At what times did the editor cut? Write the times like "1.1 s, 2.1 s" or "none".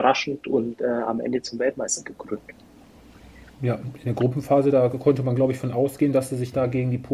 none